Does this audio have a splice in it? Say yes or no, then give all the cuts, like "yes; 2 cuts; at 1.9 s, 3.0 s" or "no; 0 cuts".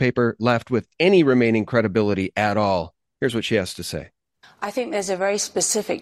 no; 0 cuts